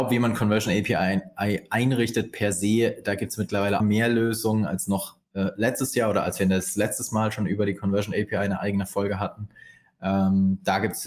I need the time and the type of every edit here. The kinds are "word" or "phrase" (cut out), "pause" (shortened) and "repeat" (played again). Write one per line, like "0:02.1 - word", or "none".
0:03.8 - phrase